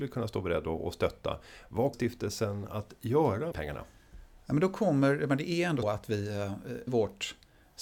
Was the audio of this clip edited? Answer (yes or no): yes